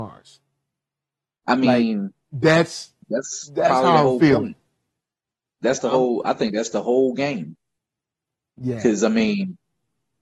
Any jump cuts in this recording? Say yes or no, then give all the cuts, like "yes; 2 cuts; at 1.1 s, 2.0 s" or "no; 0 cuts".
no; 0 cuts